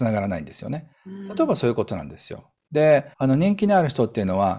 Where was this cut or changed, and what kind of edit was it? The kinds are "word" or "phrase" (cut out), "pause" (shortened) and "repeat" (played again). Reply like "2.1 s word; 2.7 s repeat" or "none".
0.9 s pause; 3.1 s pause

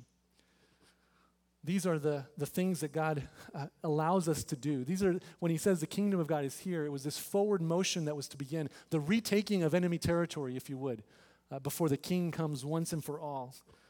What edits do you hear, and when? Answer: none

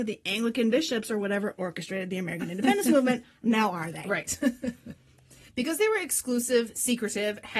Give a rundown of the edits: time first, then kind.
none

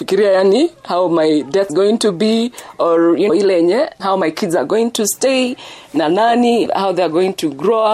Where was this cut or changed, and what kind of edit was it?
1.7 s word; 3.3 s word; 4.0 s word; 6.7 s word

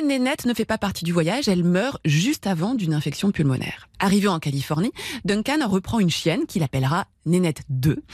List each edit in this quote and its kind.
3.9 s pause

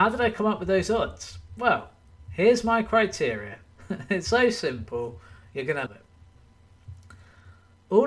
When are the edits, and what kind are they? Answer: 4.2 s word; 5.9 s word

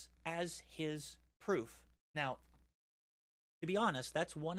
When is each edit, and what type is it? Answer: 1.9 s pause

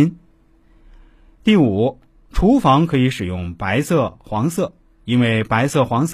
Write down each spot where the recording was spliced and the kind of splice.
none

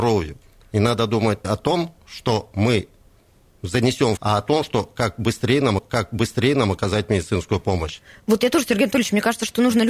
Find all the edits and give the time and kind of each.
1.4 s word; 4.2 s phrase; 5.8 s repeat

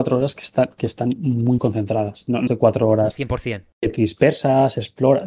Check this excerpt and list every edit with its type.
1.6 s word; 2.5 s word

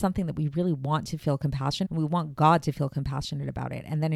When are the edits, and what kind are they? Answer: 1.8 s word

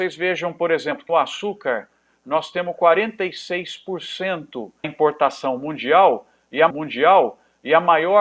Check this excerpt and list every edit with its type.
1.1 s word; 4.8 s word; 6.7 s repeat

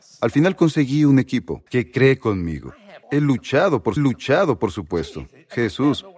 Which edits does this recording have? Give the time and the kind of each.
1.7 s pause; 3.0 s pause; 4.0 s repeat

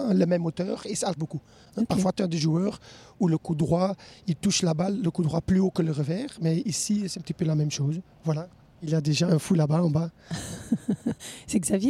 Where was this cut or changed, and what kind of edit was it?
1.2 s word; 9.3 s word

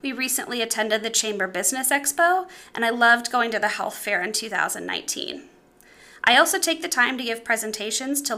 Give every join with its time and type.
none

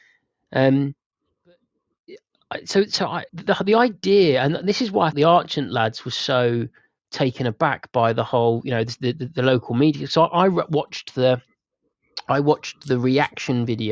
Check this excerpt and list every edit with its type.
3.3 s pause; 5.1 s word

